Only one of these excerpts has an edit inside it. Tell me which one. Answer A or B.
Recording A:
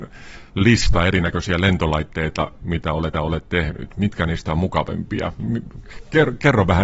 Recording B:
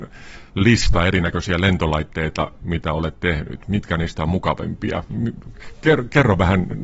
A